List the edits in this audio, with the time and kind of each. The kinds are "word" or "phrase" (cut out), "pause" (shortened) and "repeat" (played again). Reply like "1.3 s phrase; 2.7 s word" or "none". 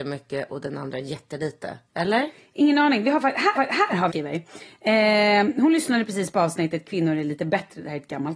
1.8 s pause; 3.6 s repeat; 4.1 s phrase